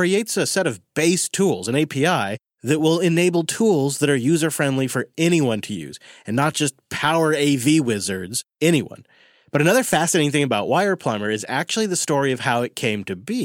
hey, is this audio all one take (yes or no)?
yes